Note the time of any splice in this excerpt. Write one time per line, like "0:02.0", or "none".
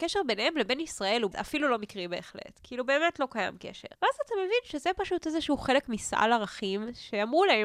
0:01.3
0:04.0